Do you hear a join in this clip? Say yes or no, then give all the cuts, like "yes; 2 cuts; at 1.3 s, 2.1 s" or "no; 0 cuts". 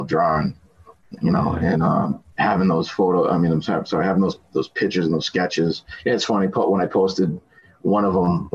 yes; 1 cut; at 2.3 s